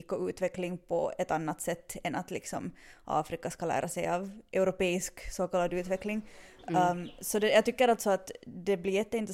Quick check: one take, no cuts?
yes; 0 cuts

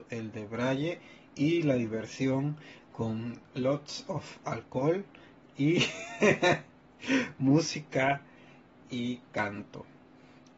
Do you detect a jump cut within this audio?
no; 0 cuts

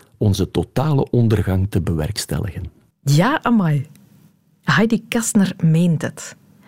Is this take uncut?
yes; 0 cuts

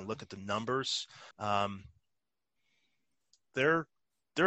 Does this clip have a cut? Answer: yes; 1 cut; at 1.3 s

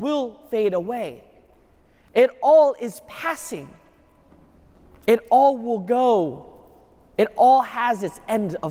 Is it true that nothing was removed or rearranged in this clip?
yes; 0 cuts

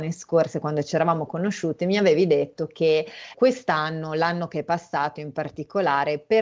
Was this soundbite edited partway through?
yes; 1 cut; at 3.3 s

